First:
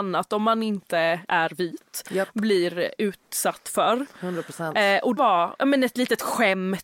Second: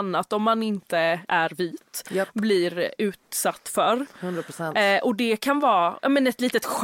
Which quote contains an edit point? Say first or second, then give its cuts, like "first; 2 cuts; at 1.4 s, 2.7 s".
first; 1 cut; at 5.2 s